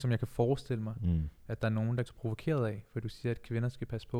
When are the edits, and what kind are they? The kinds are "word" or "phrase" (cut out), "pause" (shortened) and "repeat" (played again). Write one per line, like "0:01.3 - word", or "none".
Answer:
0:02.1 - phrase